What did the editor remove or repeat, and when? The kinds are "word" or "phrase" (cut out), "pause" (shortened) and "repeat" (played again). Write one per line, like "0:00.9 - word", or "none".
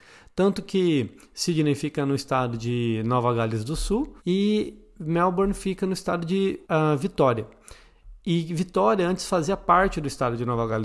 0:04.2 - pause
0:06.6 - pause